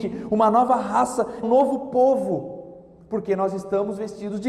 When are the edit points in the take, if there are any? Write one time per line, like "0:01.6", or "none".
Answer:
0:01.4